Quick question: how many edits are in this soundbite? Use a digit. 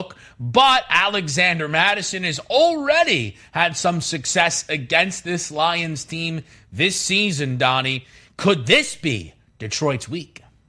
0